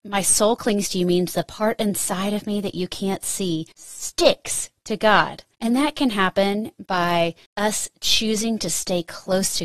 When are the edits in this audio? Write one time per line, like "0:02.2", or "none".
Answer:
0:03.7
0:05.5
0:07.4

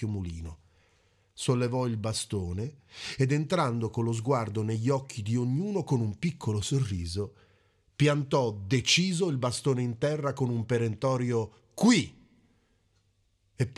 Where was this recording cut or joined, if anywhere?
none

